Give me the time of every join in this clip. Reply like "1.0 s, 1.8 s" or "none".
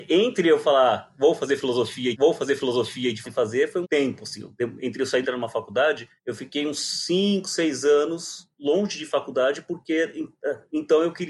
2.1 s, 3.2 s, 3.8 s, 5.2 s, 6.2 s